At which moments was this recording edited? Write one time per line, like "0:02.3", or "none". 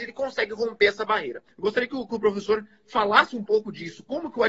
0:01.5